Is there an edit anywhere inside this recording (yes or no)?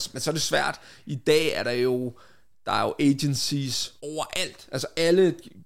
yes